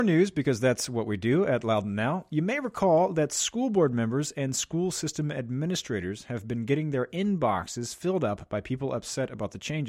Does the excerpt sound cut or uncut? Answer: uncut